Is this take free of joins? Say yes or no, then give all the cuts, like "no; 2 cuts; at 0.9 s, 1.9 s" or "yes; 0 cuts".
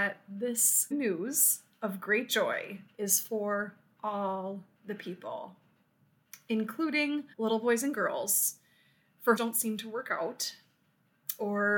no; 4 cuts; at 0.9 s, 2.9 s, 7.3 s, 9.4 s